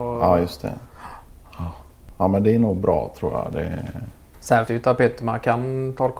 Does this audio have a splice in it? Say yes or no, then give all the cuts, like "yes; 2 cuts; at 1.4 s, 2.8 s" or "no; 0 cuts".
yes; 1 cut; at 4.7 s